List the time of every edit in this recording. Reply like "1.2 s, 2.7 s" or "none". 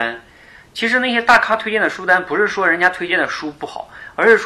none